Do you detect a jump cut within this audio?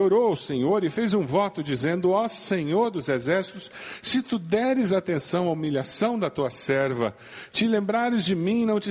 no; 0 cuts

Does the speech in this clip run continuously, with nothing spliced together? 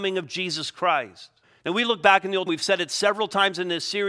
no; 2 cuts; at 1.4 s, 2.5 s

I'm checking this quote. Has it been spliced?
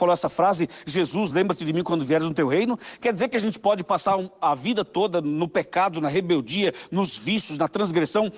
no; 0 cuts

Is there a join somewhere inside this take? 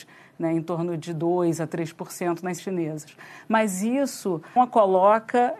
yes; 2 cuts; at 2.6 s, 4.6 s

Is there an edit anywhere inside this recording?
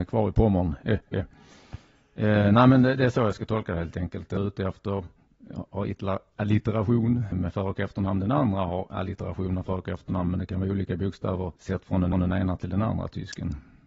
yes; 4 cuts; at 4.4 s, 7.3 s, 11.6 s, 12.1 s

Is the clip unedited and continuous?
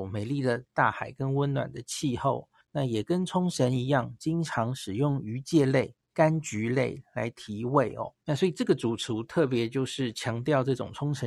no; 3 cuts; at 2.6 s, 6.0 s, 8.2 s

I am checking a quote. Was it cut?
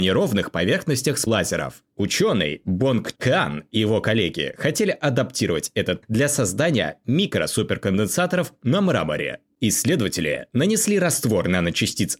yes; 4 cuts; at 1.3 s, 1.9 s, 3.2 s, 6.0 s

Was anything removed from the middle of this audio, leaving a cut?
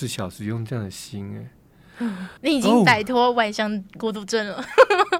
yes; 1 cut; at 2.4 s

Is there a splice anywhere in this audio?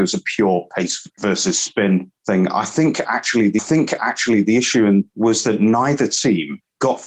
yes; 2 cuts; at 3.6 s, 5.1 s

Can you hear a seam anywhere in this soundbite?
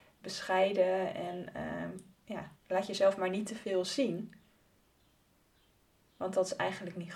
yes; 1 cut; at 2.6 s

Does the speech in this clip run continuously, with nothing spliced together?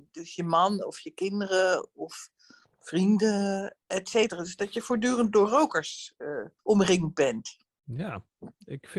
no; 2 cuts; at 3.8 s, 6.6 s

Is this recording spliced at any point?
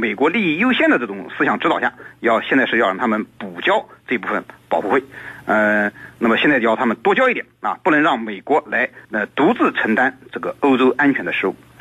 yes; 1 cut; at 9.0 s

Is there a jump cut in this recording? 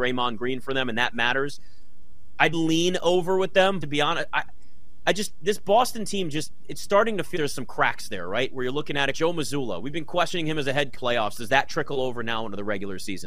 yes; 5 cuts; at 2.5 s, 3.8 s, 7.3 s, 9.1 s, 10.9 s

